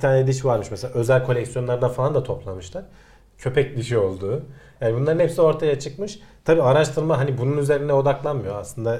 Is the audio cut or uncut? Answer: uncut